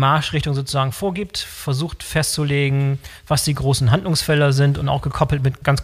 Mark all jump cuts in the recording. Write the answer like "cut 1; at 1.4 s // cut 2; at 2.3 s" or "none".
none